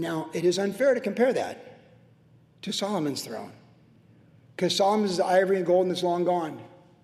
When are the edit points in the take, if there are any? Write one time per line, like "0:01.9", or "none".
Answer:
none